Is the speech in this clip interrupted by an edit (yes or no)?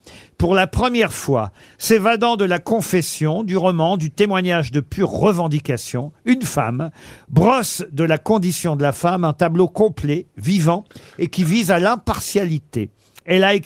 no